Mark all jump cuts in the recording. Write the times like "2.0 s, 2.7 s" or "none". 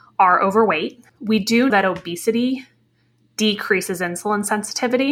1.1 s, 1.7 s